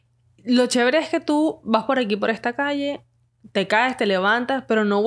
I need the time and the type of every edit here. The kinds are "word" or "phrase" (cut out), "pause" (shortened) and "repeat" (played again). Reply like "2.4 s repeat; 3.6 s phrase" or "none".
none

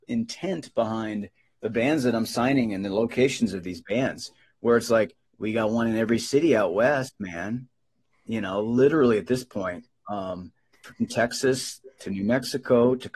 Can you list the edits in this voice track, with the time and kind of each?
5.3 s pause; 10.7 s pause

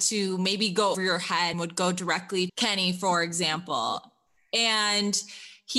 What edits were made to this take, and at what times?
0.9 s word; 1.5 s word; 2.5 s word

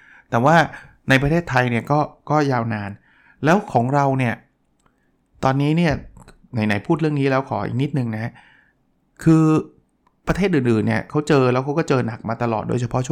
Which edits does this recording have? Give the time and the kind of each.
none

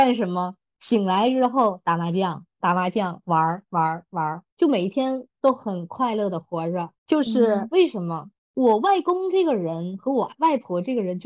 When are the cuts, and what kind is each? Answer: 4.5 s pause; 7.0 s pause; 8.4 s pause

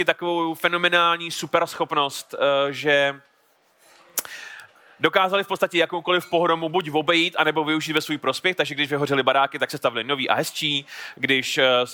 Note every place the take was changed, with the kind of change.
none

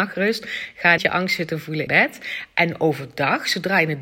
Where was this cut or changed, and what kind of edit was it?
1.0 s word; 1.9 s word

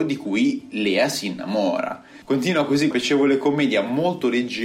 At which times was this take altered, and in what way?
2.2 s pause; 2.9 s word

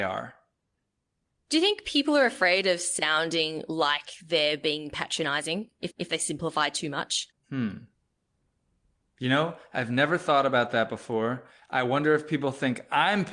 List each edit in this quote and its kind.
5.9 s repeat; 7.3 s pause

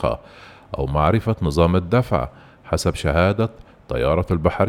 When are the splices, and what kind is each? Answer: none

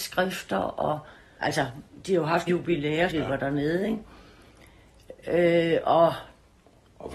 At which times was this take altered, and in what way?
1.4 s word; 2.5 s word; 3.1 s word

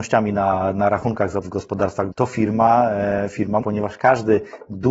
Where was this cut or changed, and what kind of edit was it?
1.4 s word; 2.1 s word; 3.6 s phrase

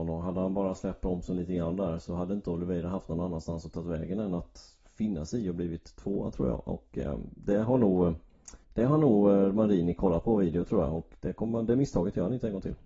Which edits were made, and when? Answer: 8.6 s pause

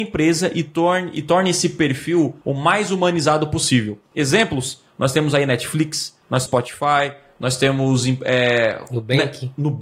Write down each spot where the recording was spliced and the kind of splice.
2.4 s pause; 6.5 s word

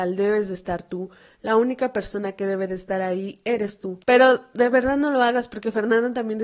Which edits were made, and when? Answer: 4.0 s pause

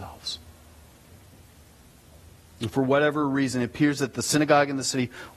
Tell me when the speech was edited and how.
none

